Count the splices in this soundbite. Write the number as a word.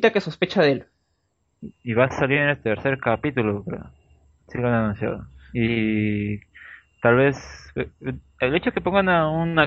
zero